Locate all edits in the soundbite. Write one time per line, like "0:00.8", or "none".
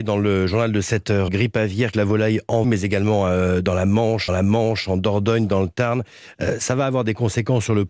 0:01.3
0:01.9
0:02.6
0:04.3